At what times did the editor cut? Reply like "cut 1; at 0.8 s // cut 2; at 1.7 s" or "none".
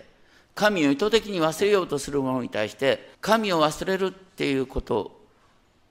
cut 1; at 3.1 s